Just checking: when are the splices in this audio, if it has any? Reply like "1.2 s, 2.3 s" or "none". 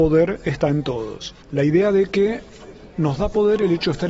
1.4 s